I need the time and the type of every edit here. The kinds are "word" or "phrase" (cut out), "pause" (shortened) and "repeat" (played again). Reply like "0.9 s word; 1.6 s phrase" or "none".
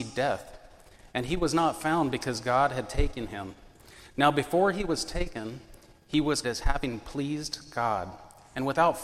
6.4 s word